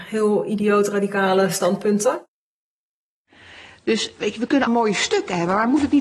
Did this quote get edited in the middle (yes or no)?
yes